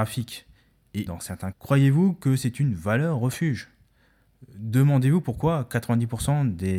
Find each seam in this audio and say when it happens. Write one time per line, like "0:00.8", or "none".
0:01.1
0:01.5